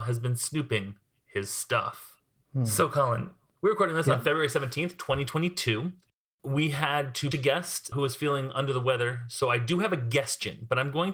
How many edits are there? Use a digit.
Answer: 2